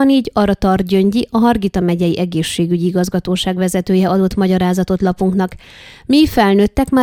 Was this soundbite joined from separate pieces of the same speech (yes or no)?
no